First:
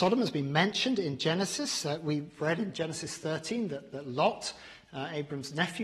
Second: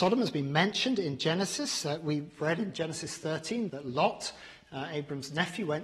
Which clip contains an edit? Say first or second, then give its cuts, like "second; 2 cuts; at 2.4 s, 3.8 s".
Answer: second; 1 cut; at 3.7 s